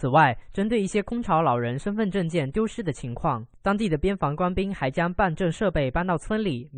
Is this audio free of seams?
yes; 0 cuts

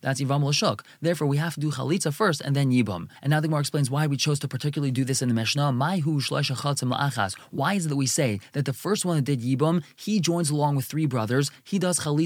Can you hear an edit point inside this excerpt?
no; 0 cuts

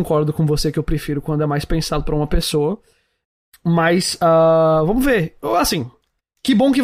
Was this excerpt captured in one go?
yes; 0 cuts

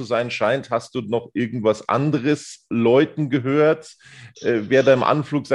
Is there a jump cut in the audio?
no; 0 cuts

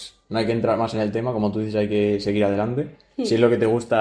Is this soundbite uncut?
yes; 0 cuts

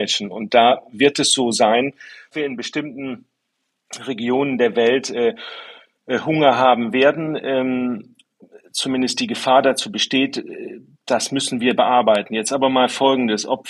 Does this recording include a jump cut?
no; 0 cuts

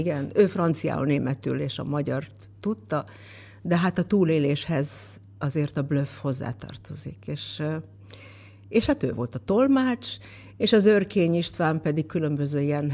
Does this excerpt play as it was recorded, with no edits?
yes; 0 cuts

